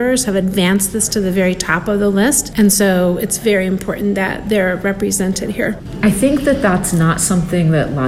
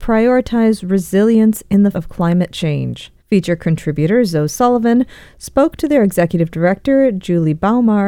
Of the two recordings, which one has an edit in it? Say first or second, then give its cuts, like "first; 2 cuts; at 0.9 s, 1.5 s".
second; 2 cuts; at 1.9 s, 3.2 s